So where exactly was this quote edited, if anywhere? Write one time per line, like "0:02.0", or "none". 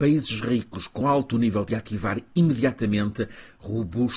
0:01.0
0:01.7